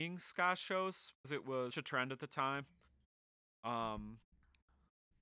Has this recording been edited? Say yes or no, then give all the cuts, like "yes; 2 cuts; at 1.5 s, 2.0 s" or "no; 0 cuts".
yes; 2 cuts; at 1.2 s, 1.7 s